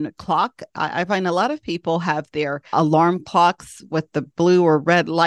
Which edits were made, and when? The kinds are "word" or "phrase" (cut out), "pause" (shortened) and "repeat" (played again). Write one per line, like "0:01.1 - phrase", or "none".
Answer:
0:02.7 - word